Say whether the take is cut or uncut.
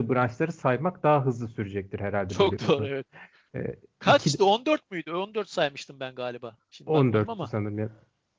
uncut